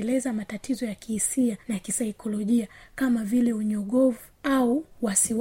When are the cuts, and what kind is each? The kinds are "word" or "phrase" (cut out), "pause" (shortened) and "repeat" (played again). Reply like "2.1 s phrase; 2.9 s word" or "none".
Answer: 1.6 s pause